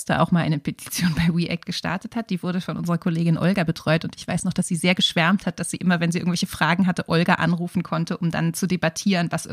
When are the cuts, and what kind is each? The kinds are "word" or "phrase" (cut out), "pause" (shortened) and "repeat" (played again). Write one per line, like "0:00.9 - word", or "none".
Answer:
none

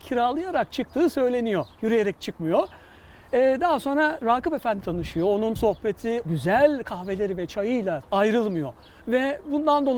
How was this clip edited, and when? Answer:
0:02.2 - word
0:04.2 - word
0:04.8 - word
0:05.6 - word
0:06.2 - word
0:08.0 - phrase

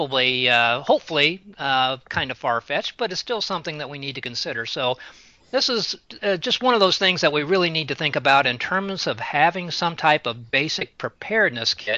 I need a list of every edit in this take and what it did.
none

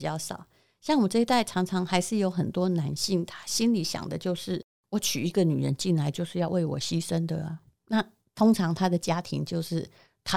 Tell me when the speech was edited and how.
none

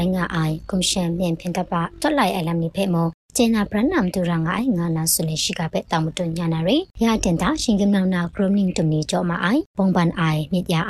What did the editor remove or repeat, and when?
0:06.9 - pause
0:09.7 - pause

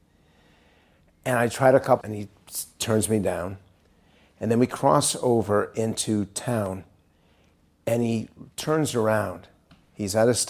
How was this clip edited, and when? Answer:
0:02.0 - word

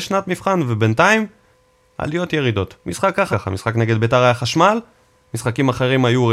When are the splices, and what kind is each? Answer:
0:02.8 - pause
0:03.3 - word

